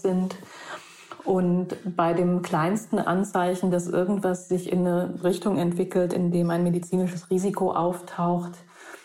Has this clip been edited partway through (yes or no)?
no